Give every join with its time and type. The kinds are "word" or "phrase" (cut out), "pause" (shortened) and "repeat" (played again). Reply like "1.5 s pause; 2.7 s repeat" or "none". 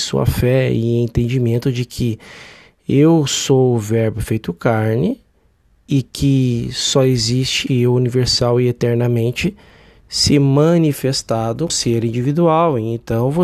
7.7 s word; 11.7 s word